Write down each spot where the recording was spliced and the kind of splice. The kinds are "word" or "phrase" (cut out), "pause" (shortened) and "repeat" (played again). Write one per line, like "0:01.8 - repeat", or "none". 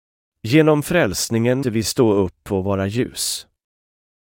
0:01.6 - word